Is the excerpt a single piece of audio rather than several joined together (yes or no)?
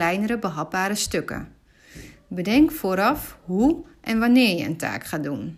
yes